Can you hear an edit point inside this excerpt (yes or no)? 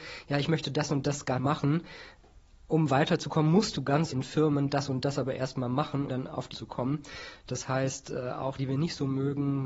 yes